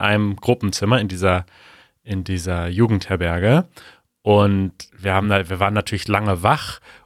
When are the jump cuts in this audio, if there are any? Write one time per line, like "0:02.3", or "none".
none